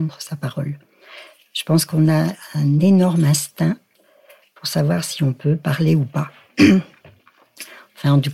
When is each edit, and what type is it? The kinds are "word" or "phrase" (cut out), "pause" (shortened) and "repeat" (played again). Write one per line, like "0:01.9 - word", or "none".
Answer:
none